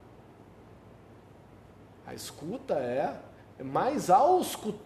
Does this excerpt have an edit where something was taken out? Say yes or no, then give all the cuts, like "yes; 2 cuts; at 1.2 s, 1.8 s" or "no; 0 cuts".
no; 0 cuts